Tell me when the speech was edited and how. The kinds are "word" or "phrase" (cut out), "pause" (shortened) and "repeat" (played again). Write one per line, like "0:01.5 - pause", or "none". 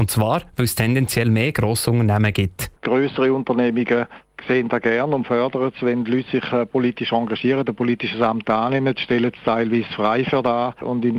0:02.8 - pause